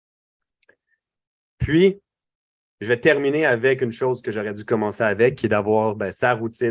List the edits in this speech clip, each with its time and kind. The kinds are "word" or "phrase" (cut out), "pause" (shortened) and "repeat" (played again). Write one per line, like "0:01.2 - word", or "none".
none